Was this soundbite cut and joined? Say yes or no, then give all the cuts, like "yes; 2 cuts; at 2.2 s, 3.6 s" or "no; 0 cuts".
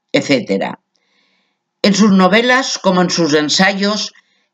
no; 0 cuts